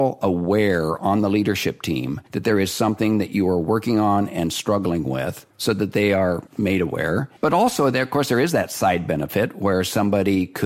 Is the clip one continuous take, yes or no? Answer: no